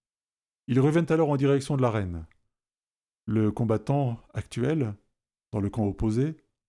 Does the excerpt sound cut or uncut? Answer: uncut